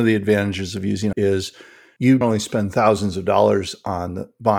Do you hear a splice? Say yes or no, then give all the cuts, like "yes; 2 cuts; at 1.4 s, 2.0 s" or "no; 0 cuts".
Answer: yes; 2 cuts; at 1.1 s, 2.2 s